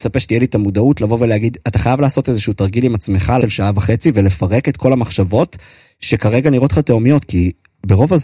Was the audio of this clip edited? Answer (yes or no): yes